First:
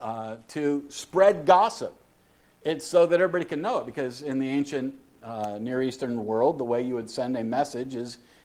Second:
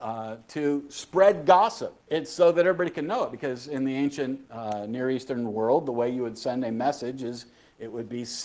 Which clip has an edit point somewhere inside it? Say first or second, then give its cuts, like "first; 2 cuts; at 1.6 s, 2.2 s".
second; 2 cuts; at 2.0 s, 4.5 s